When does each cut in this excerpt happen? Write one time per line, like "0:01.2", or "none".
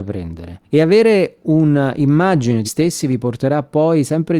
0:02.6